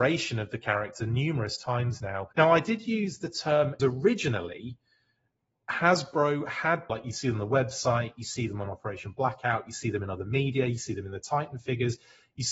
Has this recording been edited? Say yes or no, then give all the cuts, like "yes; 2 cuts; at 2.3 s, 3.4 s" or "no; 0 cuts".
yes; 3 cuts; at 2.3 s, 3.8 s, 6.9 s